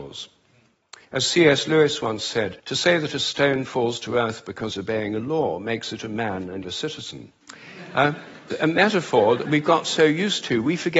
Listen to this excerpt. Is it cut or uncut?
cut